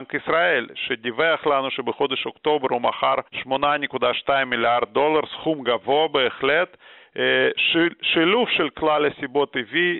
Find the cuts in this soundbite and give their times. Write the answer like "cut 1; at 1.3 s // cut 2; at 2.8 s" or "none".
cut 1; at 3.3 s